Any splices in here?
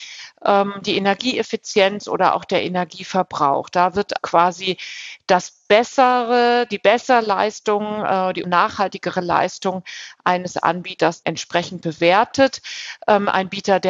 yes; 3 cuts; at 4.2 s, 8.4 s, 11.2 s

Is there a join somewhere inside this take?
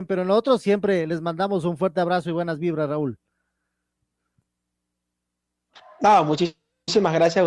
no; 0 cuts

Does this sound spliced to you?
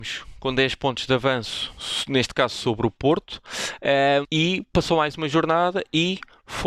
yes; 1 cut; at 4.2 s

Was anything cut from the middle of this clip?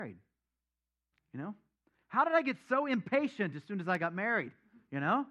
no; 0 cuts

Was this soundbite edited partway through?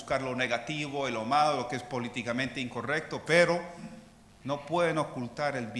no; 0 cuts

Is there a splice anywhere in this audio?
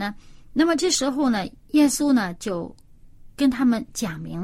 yes; 1 cut; at 1.6 s

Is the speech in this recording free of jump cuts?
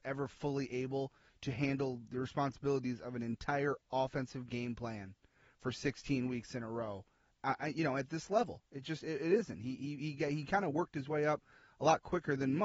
yes; 0 cuts

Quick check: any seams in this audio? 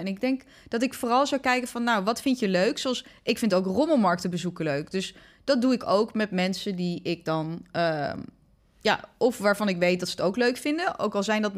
no; 0 cuts

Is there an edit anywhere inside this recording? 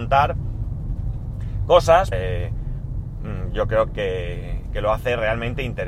yes; 2 cuts; at 2.1 s, 3.9 s

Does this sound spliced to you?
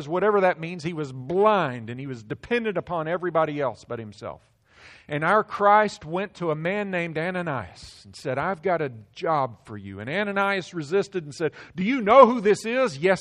no; 0 cuts

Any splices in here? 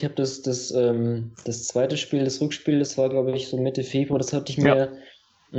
no; 0 cuts

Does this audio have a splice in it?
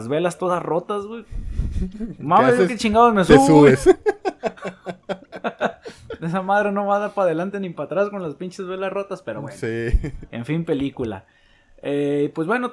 no; 0 cuts

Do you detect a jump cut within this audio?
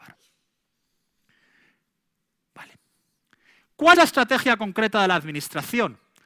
yes; 1 cut; at 3.9 s

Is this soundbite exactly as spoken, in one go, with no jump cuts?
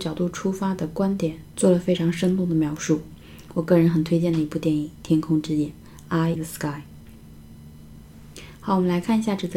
no; 1 cut; at 6.4 s

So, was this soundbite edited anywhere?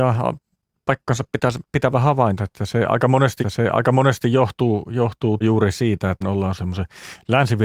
yes; 5 cuts; at 2.4 s, 3.4 s, 5.4 s, 6.2 s, 6.6 s

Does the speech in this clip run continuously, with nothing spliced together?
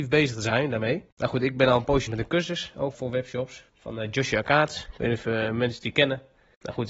no; 4 cuts; at 1.1 s, 2.1 s, 2.9 s, 3.7 s

